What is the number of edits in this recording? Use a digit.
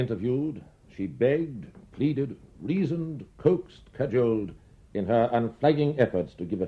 0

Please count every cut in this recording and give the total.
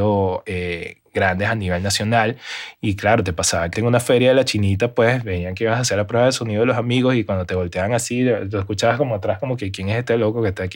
1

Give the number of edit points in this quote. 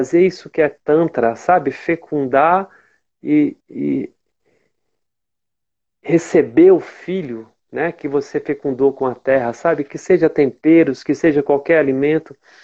1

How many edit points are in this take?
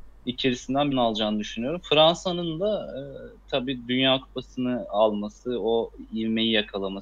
1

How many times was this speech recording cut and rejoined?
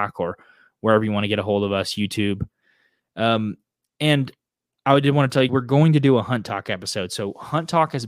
1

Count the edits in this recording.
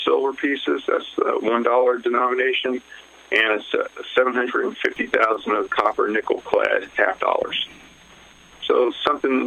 1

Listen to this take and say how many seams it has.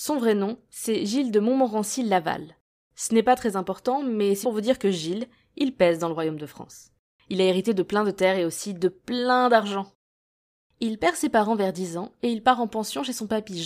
1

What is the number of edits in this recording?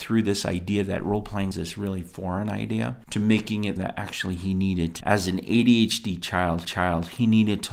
4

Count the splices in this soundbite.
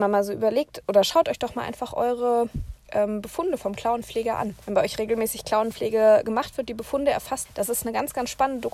2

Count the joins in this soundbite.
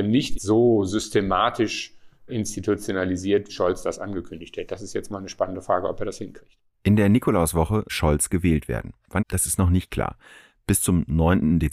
4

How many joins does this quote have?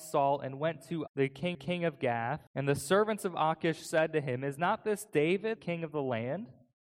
4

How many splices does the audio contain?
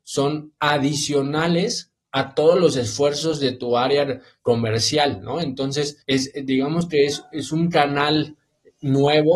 1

